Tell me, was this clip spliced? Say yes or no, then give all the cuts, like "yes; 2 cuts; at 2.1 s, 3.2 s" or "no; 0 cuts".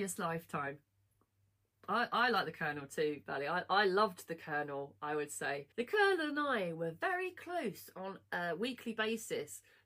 yes; 1 cut; at 5.7 s